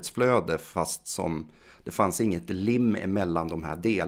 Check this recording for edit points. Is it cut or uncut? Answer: uncut